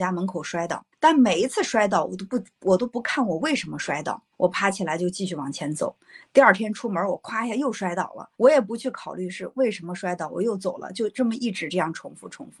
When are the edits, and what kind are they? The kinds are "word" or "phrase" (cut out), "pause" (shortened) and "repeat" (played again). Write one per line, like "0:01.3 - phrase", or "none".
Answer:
0:00.9 - pause
0:04.3 - pause
0:08.3 - pause